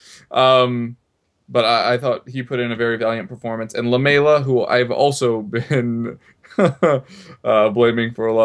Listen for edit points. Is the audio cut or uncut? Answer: uncut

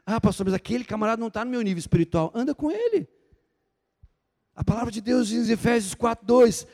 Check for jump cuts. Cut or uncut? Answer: uncut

